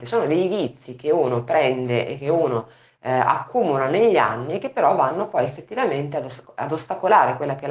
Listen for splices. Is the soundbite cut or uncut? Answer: uncut